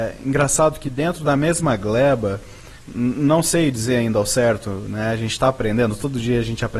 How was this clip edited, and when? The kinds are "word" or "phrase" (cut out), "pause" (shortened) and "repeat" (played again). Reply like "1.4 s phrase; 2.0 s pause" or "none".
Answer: 2.8 s pause